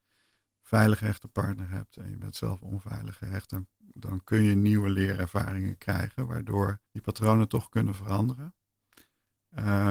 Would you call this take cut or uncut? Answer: cut